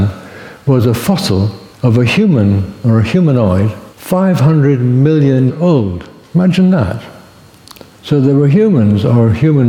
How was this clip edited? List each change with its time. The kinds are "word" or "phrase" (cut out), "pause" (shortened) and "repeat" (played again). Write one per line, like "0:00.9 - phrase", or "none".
0:01.7 - pause
0:03.9 - pause
0:05.5 - word
0:07.9 - pause